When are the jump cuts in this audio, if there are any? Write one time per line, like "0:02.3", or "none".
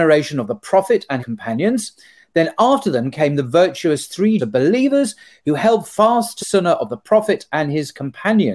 0:01.2
0:04.4
0:06.4